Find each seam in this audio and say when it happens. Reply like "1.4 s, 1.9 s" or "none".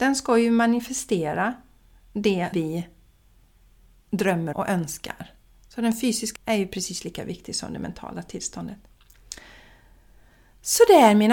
2.5 s, 4.5 s, 6.4 s